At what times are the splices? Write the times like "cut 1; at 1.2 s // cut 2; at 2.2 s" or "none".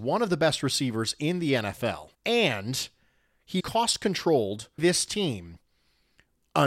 cut 1; at 2.1 s // cut 2; at 3.6 s // cut 3; at 4.8 s